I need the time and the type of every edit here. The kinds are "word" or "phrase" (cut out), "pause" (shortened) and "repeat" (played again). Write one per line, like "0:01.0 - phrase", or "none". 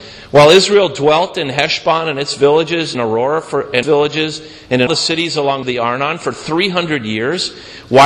0:02.9 - word
0:03.8 - word
0:04.9 - word
0:05.6 - phrase